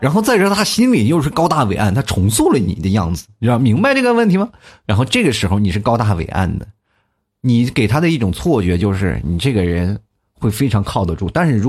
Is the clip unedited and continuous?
yes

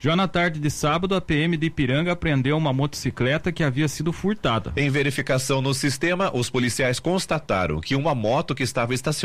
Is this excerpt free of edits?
yes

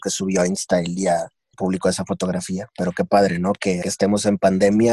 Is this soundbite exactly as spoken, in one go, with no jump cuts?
no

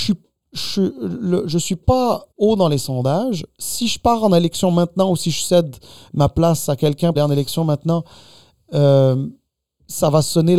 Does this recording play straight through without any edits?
no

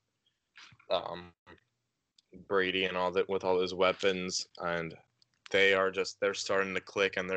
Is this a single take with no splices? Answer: yes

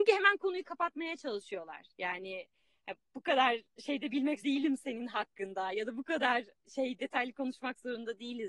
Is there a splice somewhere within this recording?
yes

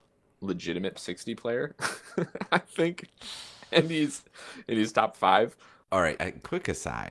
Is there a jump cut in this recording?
yes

